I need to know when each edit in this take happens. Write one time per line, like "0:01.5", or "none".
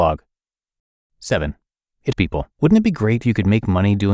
0:02.1
0:02.5
0:03.2